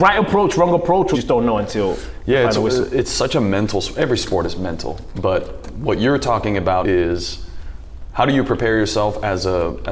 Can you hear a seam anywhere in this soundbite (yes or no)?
yes